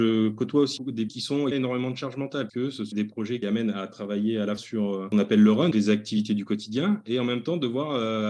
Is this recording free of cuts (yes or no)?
no